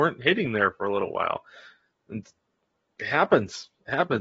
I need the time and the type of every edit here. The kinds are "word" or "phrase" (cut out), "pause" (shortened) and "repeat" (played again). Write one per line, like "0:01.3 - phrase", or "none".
none